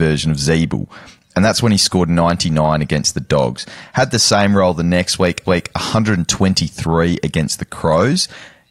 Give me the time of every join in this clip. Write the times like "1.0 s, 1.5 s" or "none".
5.5 s